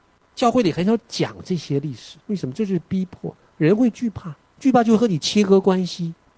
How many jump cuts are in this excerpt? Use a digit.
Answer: 2